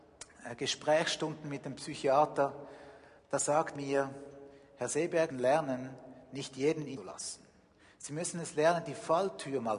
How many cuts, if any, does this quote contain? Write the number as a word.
four